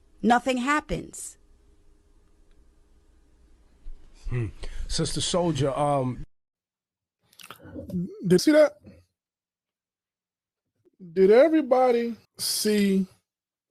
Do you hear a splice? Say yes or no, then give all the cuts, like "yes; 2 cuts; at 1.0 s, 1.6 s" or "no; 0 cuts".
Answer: yes; 2 cuts; at 8.4 s, 12.2 s